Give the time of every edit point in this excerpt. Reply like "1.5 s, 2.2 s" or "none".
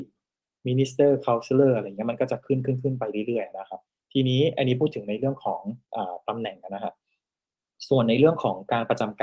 3.9 s, 5.8 s